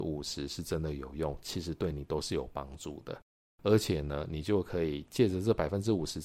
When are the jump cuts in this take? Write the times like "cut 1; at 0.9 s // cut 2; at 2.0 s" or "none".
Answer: none